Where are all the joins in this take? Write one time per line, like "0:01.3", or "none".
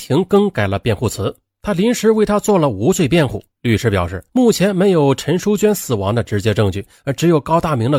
0:03.5
0:04.3